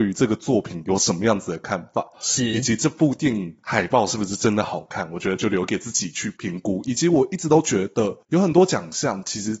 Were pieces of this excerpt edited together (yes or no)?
yes